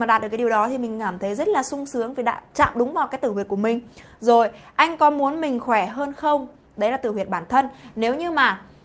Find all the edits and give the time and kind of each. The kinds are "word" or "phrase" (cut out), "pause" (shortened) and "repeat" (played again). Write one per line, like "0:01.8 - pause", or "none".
none